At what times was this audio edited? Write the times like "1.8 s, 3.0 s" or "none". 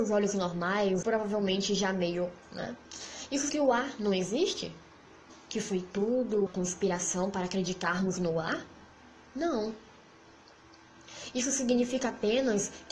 1.0 s, 2.4 s, 3.5 s, 6.5 s